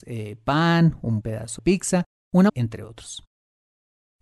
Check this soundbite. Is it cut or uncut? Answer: cut